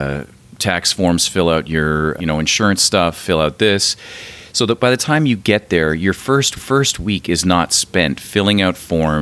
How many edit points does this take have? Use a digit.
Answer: 2